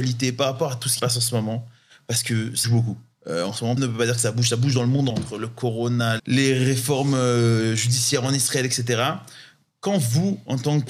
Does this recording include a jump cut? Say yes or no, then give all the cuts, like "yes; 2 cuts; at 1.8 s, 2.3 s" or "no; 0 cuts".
yes; 5 cuts; at 1.0 s, 2.6 s, 3.8 s, 5.1 s, 6.2 s